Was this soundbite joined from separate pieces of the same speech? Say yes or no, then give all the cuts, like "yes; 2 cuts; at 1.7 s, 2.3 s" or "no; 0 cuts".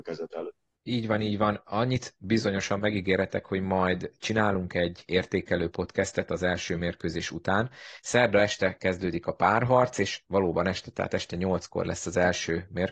no; 0 cuts